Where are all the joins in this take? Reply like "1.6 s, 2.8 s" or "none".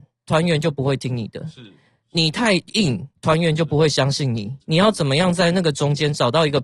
4.6 s